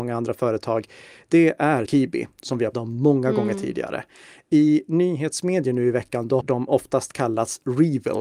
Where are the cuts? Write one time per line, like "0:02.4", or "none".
0:01.9
0:02.7
0:06.4